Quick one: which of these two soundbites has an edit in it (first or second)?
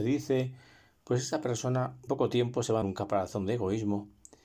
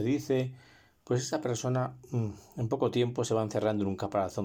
first